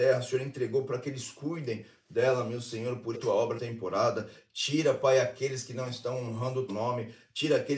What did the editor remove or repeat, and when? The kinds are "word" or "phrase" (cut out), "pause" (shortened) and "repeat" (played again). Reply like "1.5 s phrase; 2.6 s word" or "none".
3.1 s phrase; 3.6 s word; 6.7 s word